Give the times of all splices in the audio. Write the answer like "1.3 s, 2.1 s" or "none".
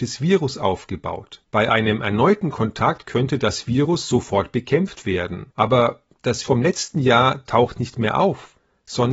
1.4 s, 5.5 s, 6.4 s